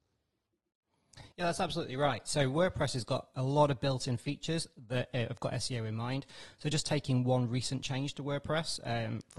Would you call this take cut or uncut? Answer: cut